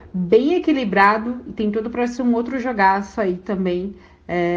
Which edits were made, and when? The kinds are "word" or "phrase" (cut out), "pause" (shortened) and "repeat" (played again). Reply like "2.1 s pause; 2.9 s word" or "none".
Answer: none